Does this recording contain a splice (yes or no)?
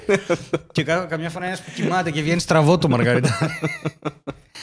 no